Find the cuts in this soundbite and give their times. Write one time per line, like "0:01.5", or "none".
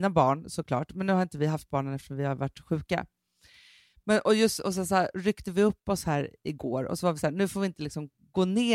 none